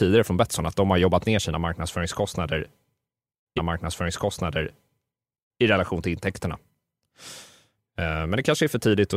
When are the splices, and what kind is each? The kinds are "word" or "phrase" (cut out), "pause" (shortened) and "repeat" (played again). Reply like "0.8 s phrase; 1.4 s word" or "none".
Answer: 3.6 s repeat